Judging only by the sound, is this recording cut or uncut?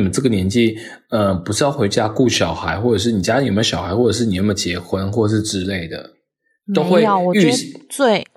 uncut